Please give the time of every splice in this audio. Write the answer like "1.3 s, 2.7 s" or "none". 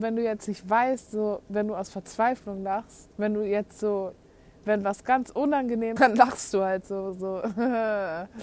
3.1 s, 6.0 s